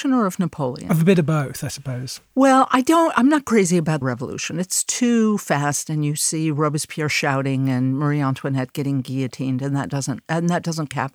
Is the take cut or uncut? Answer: cut